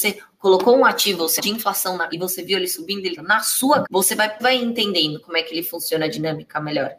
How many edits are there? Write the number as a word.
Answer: five